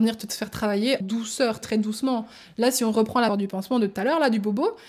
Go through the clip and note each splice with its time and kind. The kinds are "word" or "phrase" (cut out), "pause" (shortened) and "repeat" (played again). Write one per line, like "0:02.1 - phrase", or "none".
0:01.0 - word
0:01.6 - word
0:03.3 - word